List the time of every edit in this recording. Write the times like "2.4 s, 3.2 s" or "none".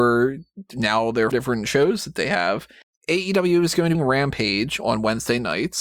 1.3 s, 2.8 s, 3.9 s